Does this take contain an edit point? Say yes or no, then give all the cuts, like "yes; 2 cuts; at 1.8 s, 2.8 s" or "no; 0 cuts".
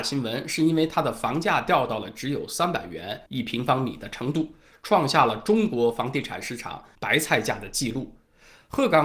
yes; 2 cuts; at 3.3 s, 6.9 s